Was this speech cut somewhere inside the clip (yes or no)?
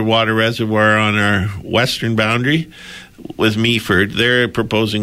no